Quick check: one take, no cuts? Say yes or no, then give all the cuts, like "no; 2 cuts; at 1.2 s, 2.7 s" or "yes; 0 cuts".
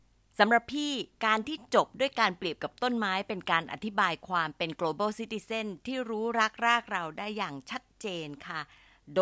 no; 1 cut; at 1.1 s